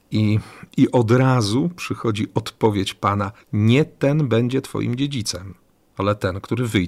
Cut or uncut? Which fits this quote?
cut